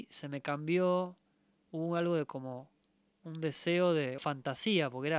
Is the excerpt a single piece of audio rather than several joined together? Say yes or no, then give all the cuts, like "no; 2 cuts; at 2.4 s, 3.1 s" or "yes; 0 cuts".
no; 1 cut; at 4.2 s